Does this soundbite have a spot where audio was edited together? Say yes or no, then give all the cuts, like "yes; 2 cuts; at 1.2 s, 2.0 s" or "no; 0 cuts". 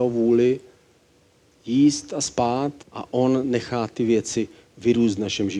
yes; 1 cut; at 2.8 s